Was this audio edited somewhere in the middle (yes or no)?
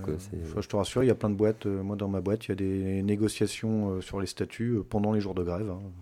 no